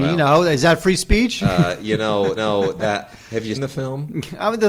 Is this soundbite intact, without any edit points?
no; 2 cuts; at 2.4 s, 3.5 s

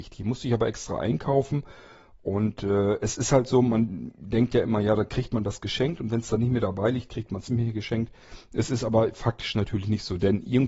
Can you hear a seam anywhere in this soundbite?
no; 0 cuts

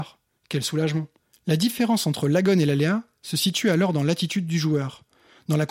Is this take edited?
yes; 1 cut; at 1.2 s

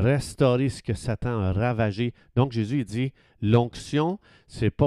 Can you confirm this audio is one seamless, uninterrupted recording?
yes; 0 cuts

